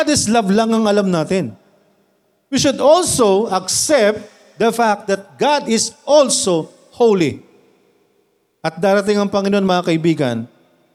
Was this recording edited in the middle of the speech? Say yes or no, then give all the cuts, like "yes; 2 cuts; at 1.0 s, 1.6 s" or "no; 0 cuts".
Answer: no; 0 cuts